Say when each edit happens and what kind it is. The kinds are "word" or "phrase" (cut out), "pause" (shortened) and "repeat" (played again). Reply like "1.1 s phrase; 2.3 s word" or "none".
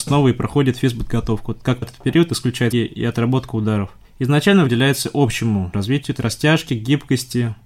1.8 s word; 2.7 s word; 4.7 s word; 5.7 s word; 6.2 s word